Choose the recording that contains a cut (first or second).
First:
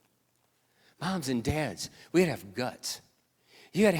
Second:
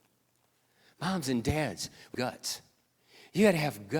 second